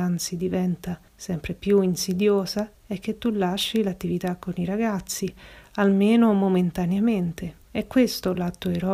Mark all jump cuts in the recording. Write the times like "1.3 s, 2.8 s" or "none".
1.1 s, 2.7 s, 7.6 s

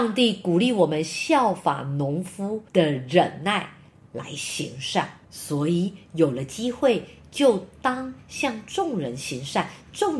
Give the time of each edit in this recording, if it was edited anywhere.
2.7 s, 5.2 s

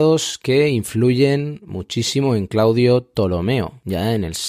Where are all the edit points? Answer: none

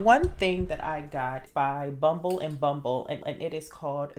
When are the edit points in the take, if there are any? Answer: 1.5 s, 3.2 s

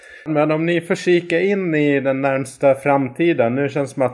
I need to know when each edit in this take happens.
none

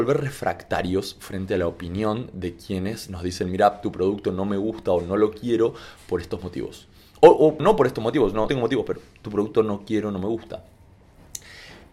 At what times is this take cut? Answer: 7.6 s, 8.5 s

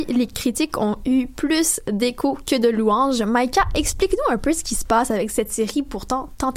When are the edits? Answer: none

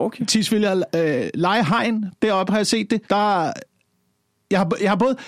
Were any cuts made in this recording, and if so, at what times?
3.0 s

